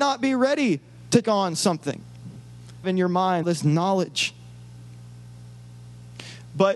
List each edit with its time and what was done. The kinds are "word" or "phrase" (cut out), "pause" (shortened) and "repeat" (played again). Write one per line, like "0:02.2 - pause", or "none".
0:01.2 - word
0:02.8 - phrase
0:03.4 - word